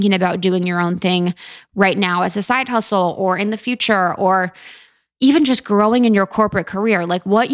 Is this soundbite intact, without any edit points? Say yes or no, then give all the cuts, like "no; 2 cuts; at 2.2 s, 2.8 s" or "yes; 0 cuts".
yes; 0 cuts